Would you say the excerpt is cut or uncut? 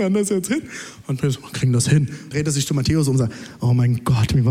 cut